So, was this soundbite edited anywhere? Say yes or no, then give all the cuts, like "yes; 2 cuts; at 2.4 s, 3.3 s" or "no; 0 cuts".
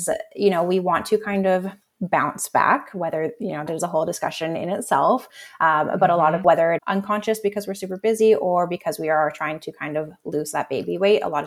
yes; 4 cuts; at 1.8 s, 3.7 s, 6.4 s, 6.8 s